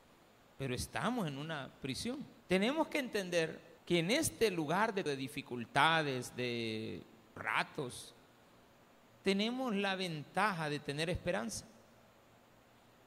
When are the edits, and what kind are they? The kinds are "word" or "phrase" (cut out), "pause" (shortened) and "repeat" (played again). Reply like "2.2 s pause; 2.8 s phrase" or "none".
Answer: 2.4 s pause; 3.8 s pause; 5.1 s word; 7.4 s word